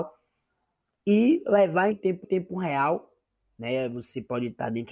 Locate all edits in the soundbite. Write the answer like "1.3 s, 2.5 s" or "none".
1.9 s, 2.2 s